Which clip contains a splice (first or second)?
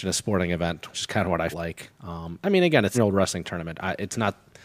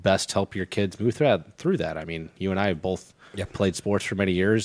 first